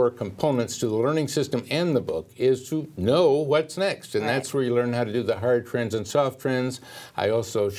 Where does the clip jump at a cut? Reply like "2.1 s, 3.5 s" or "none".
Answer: none

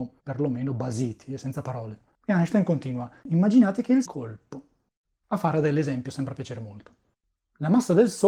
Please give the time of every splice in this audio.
4.1 s

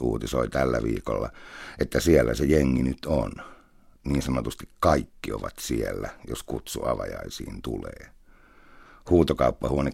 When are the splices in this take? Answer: none

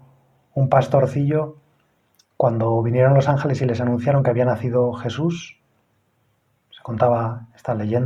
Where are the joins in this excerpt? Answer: none

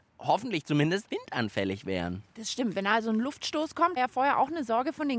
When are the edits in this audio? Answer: 1.1 s, 4.0 s

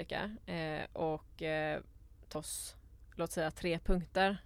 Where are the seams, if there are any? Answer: 2.3 s

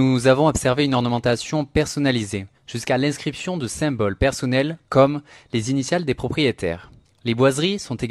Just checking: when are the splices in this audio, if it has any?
2.5 s, 4.8 s, 7.0 s

